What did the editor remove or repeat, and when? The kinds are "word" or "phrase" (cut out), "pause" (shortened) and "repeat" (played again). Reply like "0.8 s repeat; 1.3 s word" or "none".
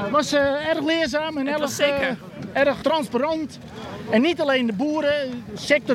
2.8 s word